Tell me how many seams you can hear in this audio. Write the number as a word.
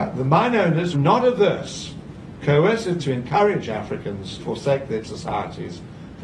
five